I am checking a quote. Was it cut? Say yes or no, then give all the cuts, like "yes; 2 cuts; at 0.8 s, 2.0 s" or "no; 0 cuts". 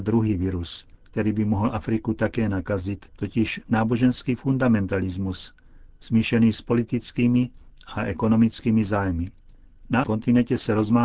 yes; 3 cuts; at 0.9 s, 3.1 s, 10.0 s